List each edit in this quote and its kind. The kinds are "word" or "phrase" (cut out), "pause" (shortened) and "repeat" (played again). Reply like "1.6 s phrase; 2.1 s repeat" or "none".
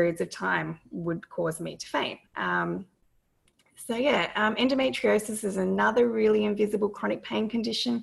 2.3 s pause